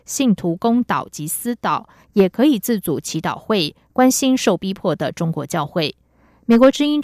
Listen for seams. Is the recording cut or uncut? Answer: uncut